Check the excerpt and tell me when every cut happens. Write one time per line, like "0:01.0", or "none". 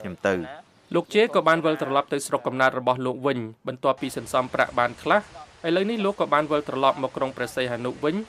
0:03.6